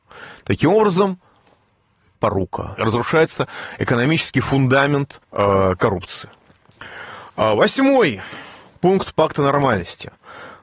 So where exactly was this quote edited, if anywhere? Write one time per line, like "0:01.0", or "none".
0:02.1
0:02.8
0:05.2